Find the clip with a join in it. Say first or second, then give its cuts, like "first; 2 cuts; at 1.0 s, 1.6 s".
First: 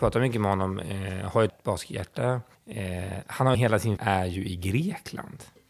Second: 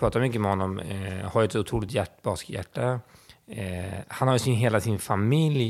first; 4 cuts; at 1.5 s, 2.5 s, 3.5 s, 4.0 s